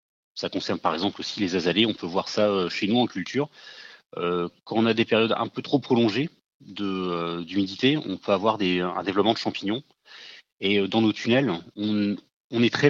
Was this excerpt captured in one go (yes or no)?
yes